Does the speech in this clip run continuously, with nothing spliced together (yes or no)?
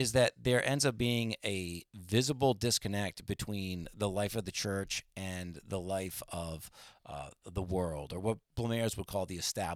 yes